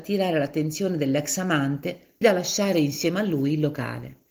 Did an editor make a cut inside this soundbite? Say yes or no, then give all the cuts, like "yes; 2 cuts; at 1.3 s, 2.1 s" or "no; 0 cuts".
yes; 1 cut; at 2.2 s